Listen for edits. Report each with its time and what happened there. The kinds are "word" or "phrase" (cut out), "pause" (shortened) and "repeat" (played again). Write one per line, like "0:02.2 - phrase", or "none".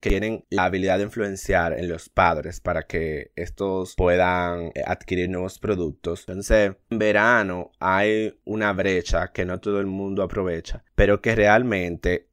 none